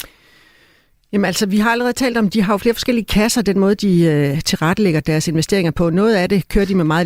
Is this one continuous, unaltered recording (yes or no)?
yes